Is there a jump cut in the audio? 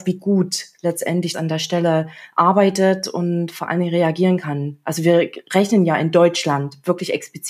yes; 1 cut; at 1.3 s

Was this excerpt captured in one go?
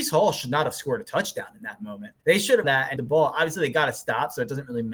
no; 3 cuts; at 2.2 s, 2.6 s, 3.0 s

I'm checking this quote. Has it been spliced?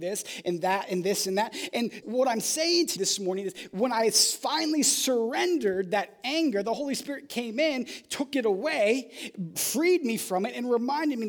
yes; 3 cuts; at 2.0 s, 3.0 s, 9.6 s

